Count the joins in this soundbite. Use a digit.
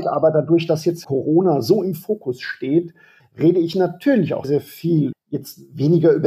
4